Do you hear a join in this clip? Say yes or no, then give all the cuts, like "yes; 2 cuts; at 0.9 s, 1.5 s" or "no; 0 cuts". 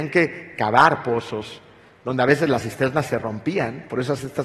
no; 0 cuts